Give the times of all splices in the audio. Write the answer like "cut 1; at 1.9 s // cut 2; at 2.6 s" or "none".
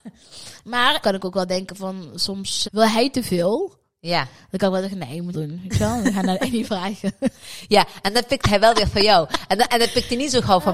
cut 1; at 1.0 s // cut 2; at 2.6 s // cut 3; at 5.3 s